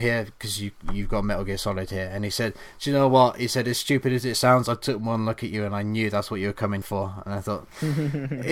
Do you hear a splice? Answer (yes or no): yes